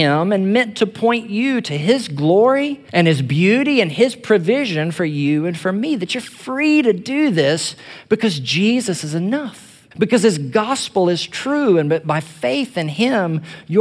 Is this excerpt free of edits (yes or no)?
no